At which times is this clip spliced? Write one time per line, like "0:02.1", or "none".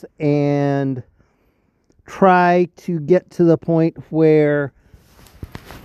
none

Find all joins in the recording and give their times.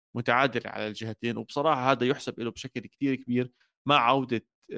none

